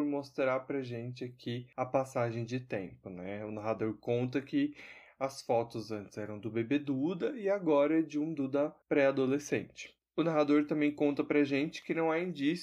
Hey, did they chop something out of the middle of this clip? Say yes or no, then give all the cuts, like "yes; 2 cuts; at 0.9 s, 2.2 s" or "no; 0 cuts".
yes; 1 cut; at 8.8 s